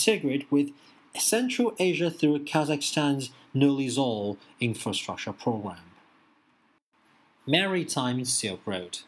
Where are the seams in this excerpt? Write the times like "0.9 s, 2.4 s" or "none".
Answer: none